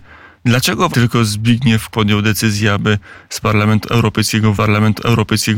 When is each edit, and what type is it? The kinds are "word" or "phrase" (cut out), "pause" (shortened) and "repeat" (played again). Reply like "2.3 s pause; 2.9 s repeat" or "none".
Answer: 0.9 s word; 1.9 s word; 4.5 s repeat